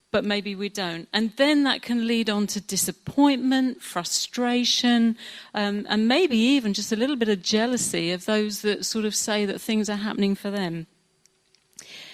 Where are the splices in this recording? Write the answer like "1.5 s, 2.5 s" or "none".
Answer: none